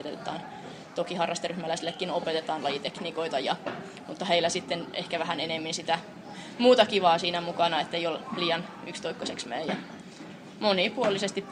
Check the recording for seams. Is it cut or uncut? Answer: uncut